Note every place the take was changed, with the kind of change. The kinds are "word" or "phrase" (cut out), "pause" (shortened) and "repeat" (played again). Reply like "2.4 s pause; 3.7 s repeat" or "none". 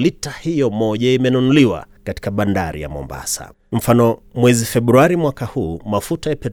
2.0 s pause; 3.6 s pause